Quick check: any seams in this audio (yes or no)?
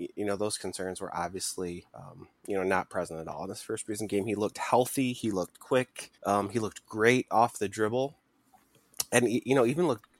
yes